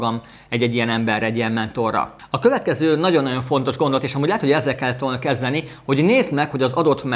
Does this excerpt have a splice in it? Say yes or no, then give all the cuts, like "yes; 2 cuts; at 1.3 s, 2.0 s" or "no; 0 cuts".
no; 0 cuts